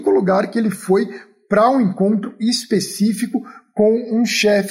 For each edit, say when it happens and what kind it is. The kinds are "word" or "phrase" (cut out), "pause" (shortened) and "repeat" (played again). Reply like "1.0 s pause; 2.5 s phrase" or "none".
none

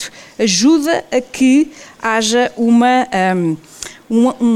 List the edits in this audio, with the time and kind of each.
none

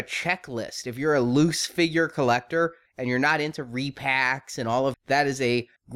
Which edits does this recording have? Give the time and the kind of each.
4.9 s word

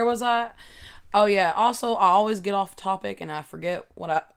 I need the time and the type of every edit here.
none

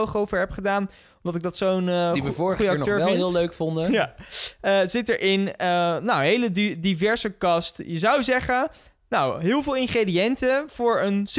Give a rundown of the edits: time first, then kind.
none

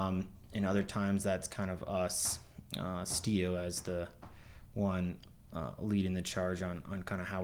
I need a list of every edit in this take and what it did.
none

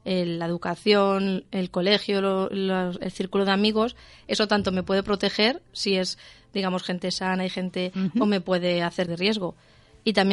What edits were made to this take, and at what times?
9.1 s phrase

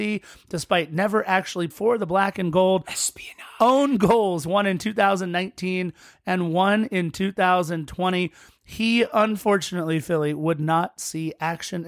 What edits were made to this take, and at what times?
1.7 s word

